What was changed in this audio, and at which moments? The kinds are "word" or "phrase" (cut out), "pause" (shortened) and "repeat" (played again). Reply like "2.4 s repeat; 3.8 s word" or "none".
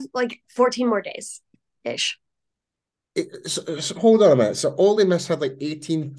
none